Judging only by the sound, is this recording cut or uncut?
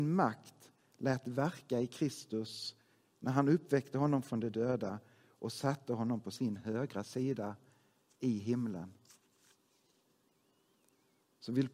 uncut